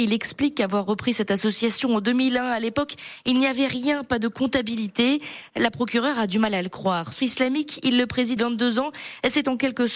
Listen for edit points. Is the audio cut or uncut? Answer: cut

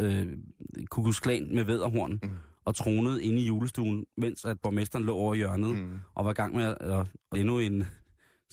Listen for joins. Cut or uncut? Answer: cut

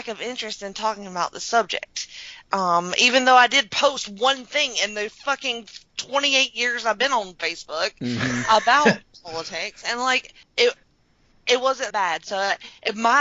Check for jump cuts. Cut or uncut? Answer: cut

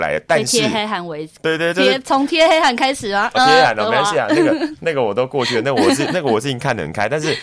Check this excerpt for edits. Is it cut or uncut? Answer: cut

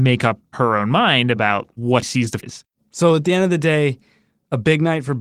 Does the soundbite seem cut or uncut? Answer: cut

